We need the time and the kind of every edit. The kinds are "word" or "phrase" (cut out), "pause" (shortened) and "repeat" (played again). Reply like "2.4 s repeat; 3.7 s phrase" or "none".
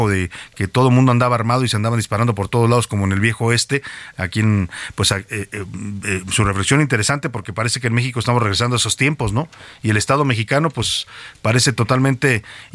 none